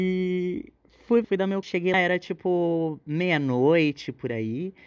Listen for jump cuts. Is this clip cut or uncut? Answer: cut